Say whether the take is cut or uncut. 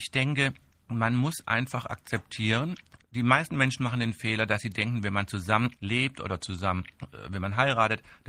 cut